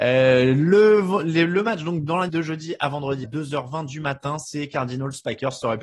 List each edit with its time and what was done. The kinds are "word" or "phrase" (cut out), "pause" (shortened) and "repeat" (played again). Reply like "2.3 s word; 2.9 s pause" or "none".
2.3 s word; 3.2 s word